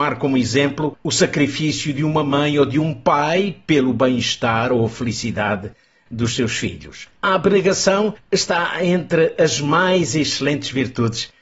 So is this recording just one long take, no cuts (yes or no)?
yes